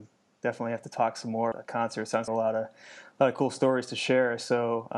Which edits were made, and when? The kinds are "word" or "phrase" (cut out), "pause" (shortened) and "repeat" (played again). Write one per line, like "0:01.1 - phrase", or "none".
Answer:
0:01.5 - word
0:02.3 - phrase